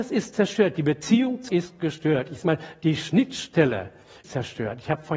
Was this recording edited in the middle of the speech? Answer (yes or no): yes